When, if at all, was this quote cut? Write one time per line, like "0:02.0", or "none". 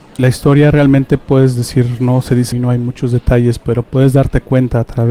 0:02.5
0:03.8